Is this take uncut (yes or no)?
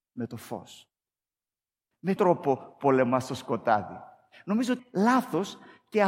no